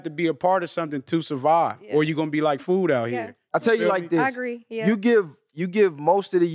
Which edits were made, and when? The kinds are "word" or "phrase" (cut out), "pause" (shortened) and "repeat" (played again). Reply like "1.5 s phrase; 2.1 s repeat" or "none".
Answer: 2.6 s word